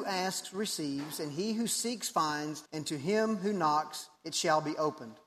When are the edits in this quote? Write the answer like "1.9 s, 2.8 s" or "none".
2.7 s, 4.2 s